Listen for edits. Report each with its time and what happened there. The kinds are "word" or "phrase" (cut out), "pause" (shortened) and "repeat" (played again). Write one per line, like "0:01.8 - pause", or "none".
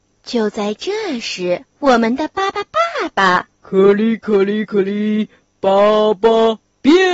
0:01.7 - pause
0:03.5 - pause